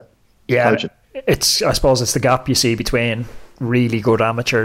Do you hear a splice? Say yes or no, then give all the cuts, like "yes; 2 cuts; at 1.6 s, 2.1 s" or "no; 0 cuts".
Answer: no; 0 cuts